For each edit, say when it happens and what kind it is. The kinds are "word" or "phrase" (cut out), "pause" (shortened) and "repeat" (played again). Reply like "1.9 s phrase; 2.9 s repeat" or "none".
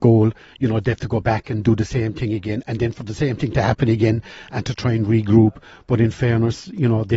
none